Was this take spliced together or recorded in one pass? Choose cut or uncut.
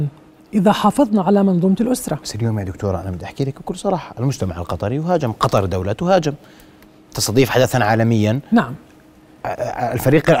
uncut